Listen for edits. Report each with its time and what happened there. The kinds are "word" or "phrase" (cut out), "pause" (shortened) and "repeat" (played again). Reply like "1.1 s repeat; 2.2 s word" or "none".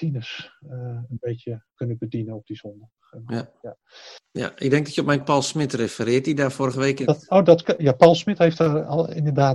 5.2 s word